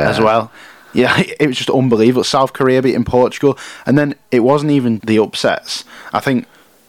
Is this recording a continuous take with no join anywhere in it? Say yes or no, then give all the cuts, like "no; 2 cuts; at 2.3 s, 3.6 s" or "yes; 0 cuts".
no; 1 cut; at 5.0 s